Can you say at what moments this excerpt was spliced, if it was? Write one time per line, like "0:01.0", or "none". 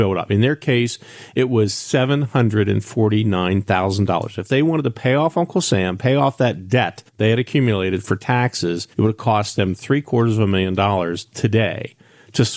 0:07.1
0:08.9